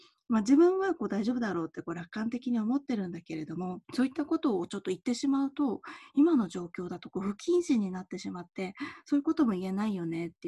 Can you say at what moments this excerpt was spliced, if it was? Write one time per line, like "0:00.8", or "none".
0:03.8